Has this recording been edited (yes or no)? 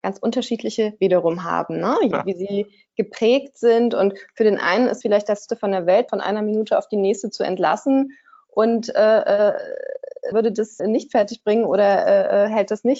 yes